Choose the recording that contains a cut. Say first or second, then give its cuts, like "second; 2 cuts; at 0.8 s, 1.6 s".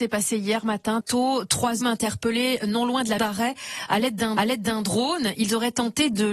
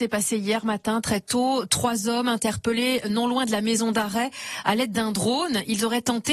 first; 4 cuts; at 1.0 s, 1.8 s, 3.2 s, 4.4 s